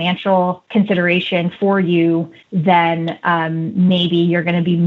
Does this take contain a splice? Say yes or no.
no